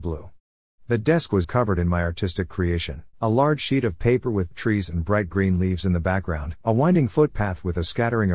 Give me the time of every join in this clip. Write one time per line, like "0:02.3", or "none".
0:01.4
0:03.1
0:04.5
0:06.6

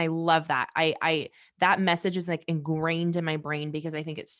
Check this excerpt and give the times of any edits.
none

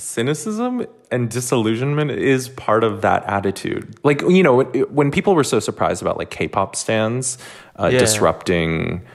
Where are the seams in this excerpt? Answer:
none

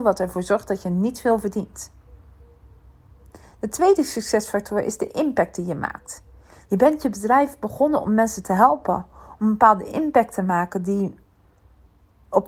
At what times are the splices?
none

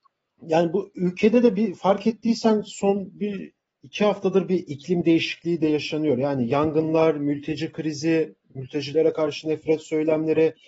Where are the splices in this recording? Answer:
0:08.4

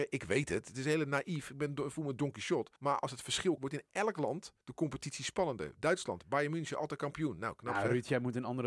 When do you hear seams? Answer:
0:02.8
0:03.6
0:04.6

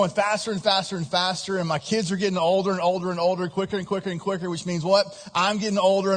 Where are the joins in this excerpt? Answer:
none

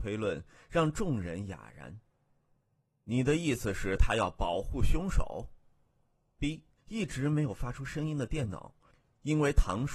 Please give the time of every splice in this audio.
0:06.8

